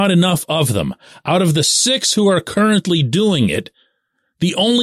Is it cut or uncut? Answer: uncut